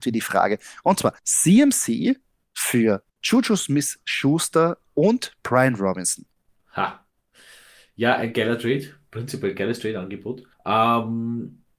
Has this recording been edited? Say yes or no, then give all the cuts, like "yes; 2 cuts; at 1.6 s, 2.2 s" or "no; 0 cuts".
yes; 4 cuts; at 1.2 s, 3.1 s, 6.5 s, 10.5 s